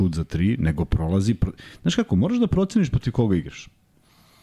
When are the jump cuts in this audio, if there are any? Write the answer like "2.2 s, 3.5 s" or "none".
none